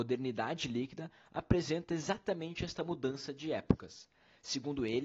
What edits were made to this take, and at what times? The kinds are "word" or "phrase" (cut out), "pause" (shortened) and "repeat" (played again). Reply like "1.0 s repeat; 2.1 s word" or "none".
none